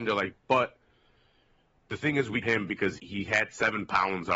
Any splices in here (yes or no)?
yes